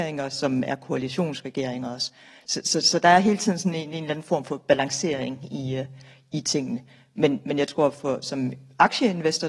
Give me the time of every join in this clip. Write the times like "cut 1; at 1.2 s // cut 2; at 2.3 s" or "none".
none